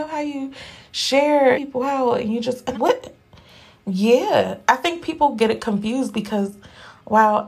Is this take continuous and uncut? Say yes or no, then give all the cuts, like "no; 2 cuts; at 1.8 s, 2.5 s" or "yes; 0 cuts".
no; 2 cuts; at 1.5 s, 2.7 s